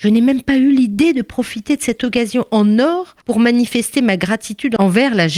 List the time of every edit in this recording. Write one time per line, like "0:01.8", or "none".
0:03.2